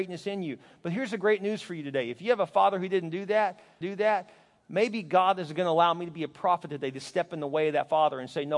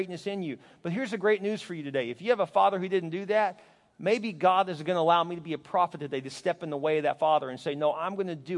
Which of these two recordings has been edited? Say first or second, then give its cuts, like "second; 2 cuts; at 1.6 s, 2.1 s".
first; 1 cut; at 3.8 s